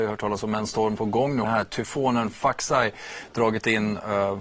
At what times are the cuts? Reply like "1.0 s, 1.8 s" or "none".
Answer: 1.0 s, 1.4 s